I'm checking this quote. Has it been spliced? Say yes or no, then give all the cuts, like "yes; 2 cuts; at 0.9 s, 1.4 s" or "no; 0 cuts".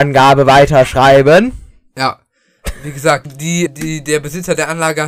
yes; 2 cuts; at 3.3 s, 3.7 s